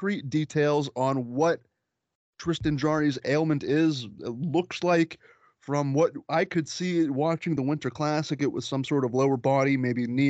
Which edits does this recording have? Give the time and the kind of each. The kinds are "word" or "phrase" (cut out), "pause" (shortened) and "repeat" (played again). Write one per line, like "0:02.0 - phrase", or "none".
none